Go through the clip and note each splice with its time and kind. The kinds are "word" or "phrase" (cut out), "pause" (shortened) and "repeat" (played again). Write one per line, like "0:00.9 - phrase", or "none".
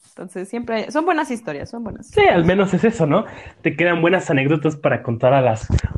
none

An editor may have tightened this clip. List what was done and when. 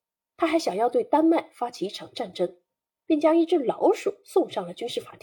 none

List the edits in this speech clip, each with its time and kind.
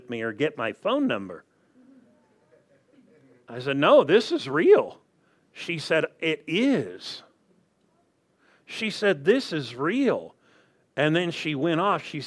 none

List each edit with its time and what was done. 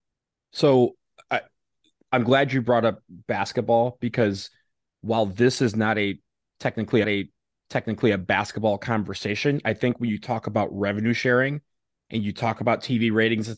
0:07.0 - repeat

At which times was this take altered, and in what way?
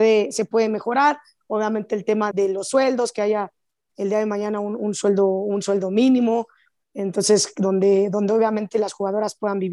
0:02.3 - word

